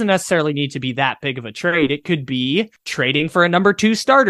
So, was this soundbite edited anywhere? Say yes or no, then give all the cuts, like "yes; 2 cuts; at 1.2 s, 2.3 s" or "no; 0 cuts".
no; 0 cuts